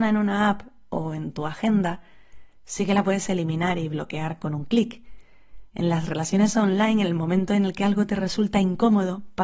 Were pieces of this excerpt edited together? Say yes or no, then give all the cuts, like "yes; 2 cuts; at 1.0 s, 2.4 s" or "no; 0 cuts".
no; 0 cuts